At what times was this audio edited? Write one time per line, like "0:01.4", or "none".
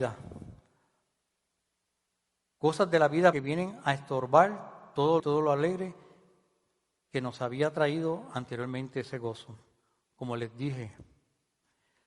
0:03.3
0:05.2